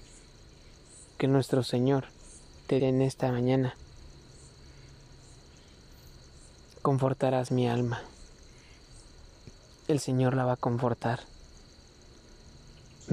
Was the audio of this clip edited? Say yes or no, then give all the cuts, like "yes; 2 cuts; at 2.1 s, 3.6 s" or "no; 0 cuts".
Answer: yes; 2 cuts; at 1.2 s, 2.8 s